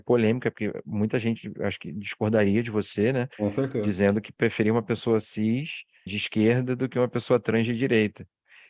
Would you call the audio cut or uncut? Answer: cut